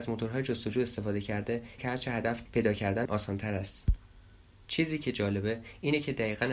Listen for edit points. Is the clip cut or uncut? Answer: cut